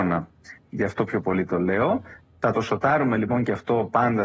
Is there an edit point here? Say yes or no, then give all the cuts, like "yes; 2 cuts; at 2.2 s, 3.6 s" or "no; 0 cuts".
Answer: no; 0 cuts